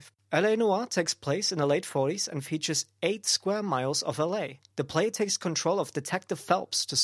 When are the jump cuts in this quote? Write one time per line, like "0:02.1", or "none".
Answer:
0:04.7